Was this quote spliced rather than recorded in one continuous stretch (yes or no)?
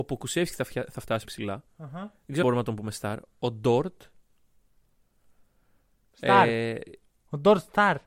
yes